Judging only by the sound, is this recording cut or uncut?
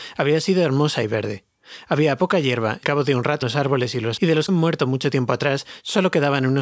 cut